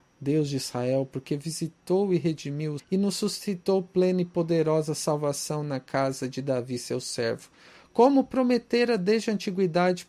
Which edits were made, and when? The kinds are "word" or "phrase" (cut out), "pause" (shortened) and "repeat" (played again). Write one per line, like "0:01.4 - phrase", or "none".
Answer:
0:02.8 - phrase